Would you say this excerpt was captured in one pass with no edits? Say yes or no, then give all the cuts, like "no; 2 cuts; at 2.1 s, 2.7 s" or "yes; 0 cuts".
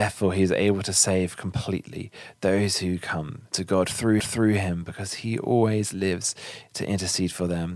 no; 1 cut; at 4.2 s